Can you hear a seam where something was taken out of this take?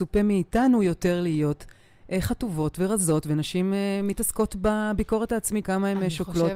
yes; 1 cut; at 5.6 s

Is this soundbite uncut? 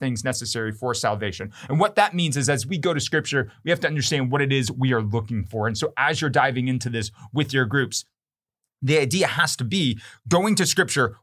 yes; 0 cuts

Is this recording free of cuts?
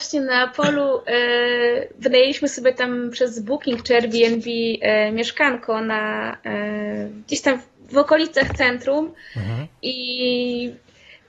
yes; 0 cuts

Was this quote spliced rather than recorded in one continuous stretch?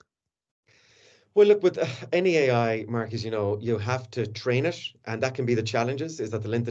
no; 0 cuts

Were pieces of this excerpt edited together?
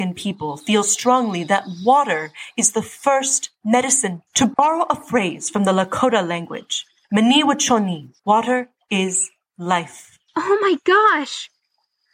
yes; 3 cuts; at 4.3 s, 8.2 s, 10.3 s

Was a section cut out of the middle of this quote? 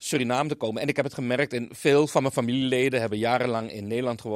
no; 0 cuts

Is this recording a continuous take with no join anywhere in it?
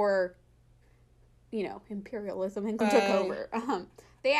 no; 1 cut; at 2.8 s

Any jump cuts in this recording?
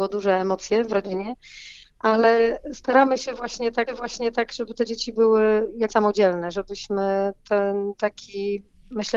yes; 2 cuts; at 3.9 s, 5.9 s

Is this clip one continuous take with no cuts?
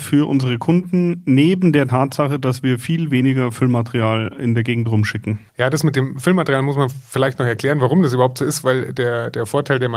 no; 1 cut; at 5.5 s

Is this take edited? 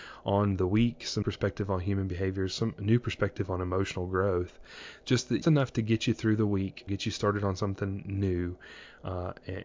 yes; 3 cuts; at 1.2 s, 5.4 s, 6.9 s

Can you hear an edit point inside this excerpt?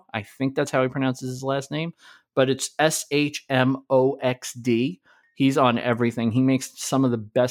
no; 0 cuts

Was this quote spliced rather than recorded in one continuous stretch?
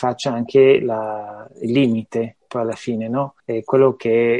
yes; 1 cut; at 3.4 s

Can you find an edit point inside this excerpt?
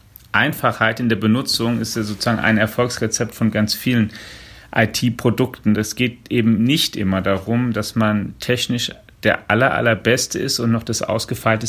no; 0 cuts

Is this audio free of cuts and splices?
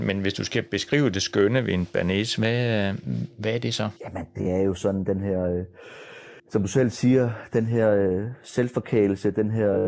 no; 2 cuts; at 4.0 s, 6.4 s

